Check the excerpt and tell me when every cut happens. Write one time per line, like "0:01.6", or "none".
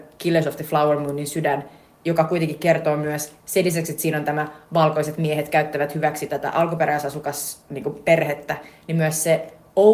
none